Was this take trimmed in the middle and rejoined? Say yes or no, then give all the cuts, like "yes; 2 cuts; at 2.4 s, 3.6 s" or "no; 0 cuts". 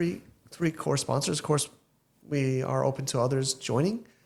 no; 0 cuts